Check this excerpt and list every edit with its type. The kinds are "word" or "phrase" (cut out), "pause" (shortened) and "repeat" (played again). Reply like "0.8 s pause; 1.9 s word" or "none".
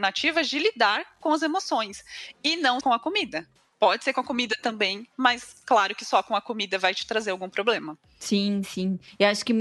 2.8 s word